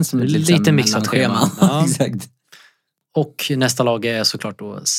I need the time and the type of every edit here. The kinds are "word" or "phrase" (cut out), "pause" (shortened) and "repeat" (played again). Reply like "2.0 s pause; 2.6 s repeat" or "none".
none

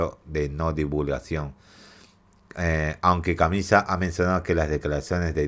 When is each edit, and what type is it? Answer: none

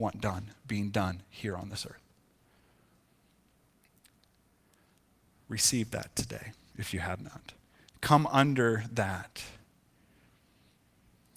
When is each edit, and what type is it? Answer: none

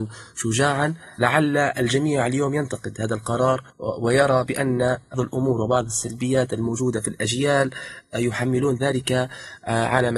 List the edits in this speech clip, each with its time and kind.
3.7 s pause; 5.1 s word

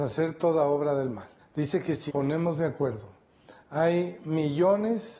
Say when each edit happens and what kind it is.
1.4 s pause; 2.1 s word; 3.6 s word

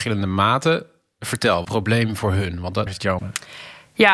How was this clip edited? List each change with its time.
1.6 s phrase; 2.9 s word; 3.2 s phrase

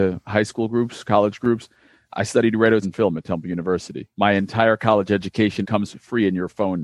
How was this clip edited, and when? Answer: 2.0 s word; 2.8 s word; 4.1 s pause; 5.6 s word

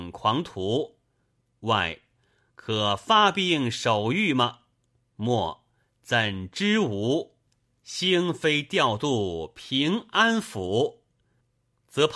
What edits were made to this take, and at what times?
none

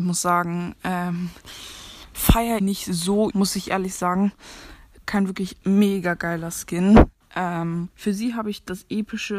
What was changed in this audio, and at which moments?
2.6 s word; 3.3 s word; 5.6 s pause; 7.9 s pause

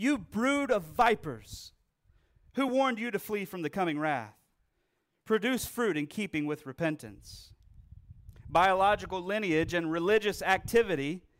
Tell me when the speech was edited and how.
none

